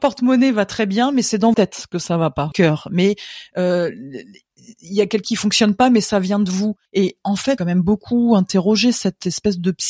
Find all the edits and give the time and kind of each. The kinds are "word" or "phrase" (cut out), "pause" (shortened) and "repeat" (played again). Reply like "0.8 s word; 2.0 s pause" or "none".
1.5 s word; 2.5 s phrase; 5.2 s word; 6.9 s pause; 7.6 s phrase